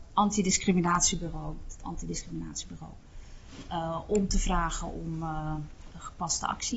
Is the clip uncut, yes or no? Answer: yes